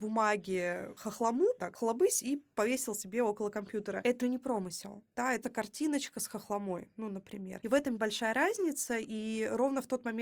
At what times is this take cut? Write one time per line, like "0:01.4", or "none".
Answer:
0:01.6
0:04.2
0:05.4
0:08.0